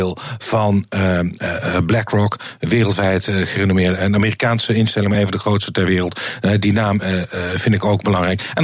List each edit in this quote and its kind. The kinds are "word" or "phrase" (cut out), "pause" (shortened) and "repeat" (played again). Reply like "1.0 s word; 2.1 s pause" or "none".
none